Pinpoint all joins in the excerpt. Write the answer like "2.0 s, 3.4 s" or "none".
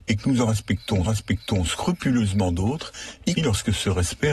1.1 s, 3.4 s